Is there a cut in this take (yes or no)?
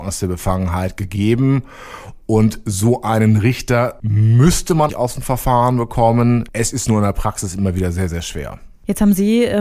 yes